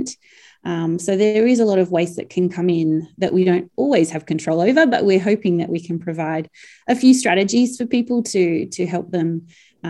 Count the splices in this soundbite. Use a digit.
0